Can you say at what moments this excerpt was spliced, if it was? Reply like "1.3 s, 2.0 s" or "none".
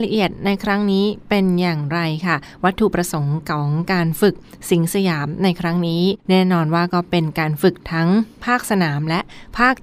6.2 s